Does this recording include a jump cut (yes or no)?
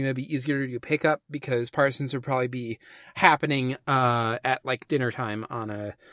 no